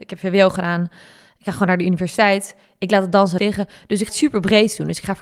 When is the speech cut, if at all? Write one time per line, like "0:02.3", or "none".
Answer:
0:03.4
0:04.1